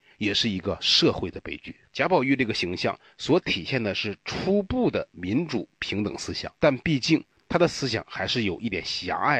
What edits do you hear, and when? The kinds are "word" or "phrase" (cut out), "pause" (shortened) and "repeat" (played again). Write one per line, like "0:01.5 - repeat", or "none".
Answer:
0:01.8 - pause
0:06.6 - pause